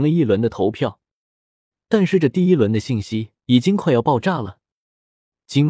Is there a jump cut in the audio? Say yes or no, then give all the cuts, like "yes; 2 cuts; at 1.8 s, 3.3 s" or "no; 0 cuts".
yes; 1 cut; at 3.4 s